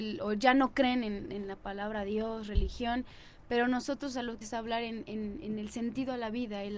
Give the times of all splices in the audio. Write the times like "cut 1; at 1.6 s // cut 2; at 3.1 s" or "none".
cut 1; at 4.4 s